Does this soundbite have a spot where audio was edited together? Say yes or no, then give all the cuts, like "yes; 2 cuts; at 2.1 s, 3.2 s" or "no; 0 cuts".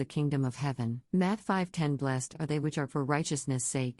yes; 2 cuts; at 1.1 s, 2.9 s